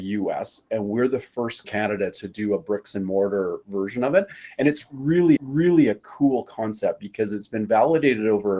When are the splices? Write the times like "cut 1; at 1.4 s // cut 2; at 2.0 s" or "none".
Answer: cut 1; at 1.6 s // cut 2; at 5.4 s